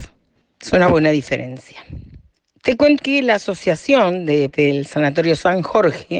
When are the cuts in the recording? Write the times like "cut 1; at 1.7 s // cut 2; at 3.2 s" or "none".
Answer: cut 1; at 3.0 s // cut 2; at 4.5 s